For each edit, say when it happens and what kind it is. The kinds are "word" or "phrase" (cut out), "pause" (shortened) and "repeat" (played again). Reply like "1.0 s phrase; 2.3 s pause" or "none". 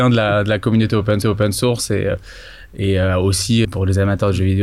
1.2 s repeat; 3.6 s word